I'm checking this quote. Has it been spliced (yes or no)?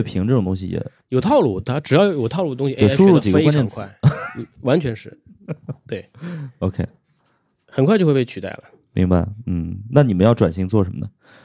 no